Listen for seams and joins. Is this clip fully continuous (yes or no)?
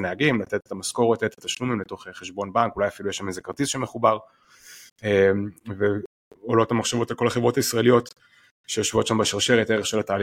yes